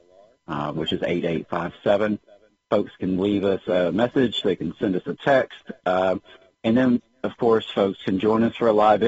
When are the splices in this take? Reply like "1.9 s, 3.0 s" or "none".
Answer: none